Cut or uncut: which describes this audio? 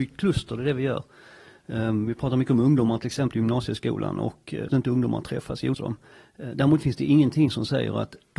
cut